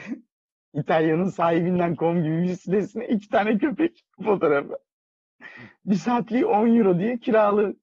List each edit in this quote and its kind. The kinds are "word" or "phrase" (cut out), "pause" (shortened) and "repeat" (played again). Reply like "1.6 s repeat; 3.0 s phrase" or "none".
4.1 s pause